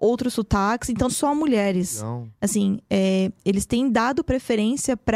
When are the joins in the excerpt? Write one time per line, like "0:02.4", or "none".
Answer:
0:01.1